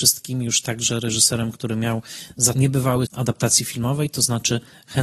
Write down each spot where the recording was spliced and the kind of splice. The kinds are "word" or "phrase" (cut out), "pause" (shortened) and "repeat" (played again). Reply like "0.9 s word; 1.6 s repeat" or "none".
2.5 s word; 3.0 s phrase